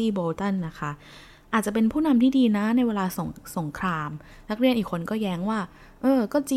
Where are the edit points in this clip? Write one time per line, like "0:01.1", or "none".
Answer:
none

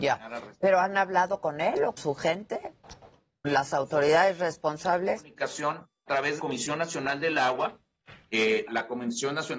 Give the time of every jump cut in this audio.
0:02.0
0:03.4
0:06.1
0:06.4
0:08.7

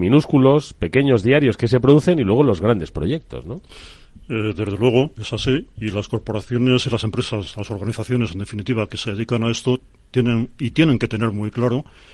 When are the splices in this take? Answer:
none

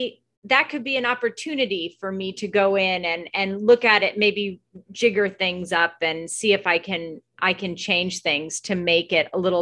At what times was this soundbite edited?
none

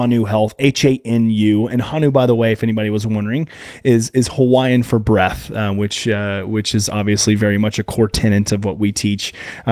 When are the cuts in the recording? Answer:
none

